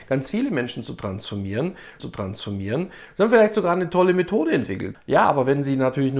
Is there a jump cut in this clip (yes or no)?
yes